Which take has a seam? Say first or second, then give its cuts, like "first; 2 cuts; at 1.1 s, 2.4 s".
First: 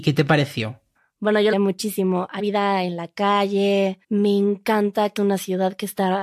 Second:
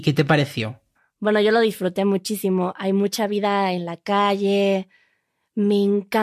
first; 4 cuts; at 1.5 s, 2.4 s, 4.0 s, 5.2 s